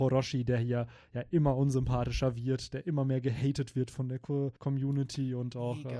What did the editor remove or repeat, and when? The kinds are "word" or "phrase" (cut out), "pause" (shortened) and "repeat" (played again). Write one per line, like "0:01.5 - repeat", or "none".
0:04.6 - pause